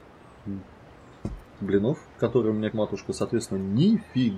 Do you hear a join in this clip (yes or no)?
yes